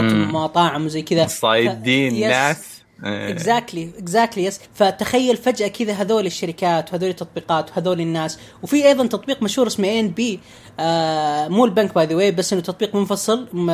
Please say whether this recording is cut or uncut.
cut